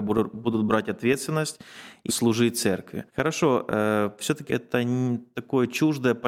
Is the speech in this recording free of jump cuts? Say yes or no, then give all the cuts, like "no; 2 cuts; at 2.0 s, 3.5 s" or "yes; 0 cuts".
no; 3 cuts; at 2.1 s, 3.1 s, 4.5 s